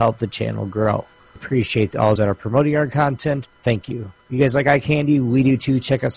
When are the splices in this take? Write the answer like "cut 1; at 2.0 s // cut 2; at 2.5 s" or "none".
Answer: cut 1; at 1.4 s // cut 2; at 2.2 s // cut 3; at 3.5 s // cut 4; at 4.2 s